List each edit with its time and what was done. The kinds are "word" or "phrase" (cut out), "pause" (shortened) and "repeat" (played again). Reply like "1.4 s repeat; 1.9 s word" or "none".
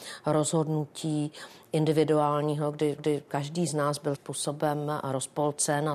3.0 s repeat; 4.1 s word